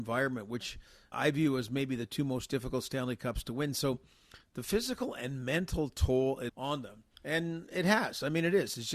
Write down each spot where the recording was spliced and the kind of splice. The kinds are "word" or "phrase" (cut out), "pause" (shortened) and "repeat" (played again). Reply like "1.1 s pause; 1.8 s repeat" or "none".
1.1 s word; 6.5 s phrase; 7.1 s pause